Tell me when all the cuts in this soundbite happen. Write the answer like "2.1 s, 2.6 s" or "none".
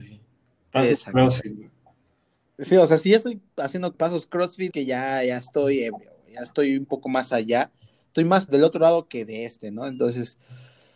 3.9 s, 4.7 s, 8.5 s